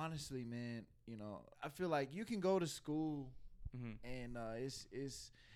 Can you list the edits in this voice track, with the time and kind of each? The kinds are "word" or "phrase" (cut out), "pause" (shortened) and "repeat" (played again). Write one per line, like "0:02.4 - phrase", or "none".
0:01.5 - pause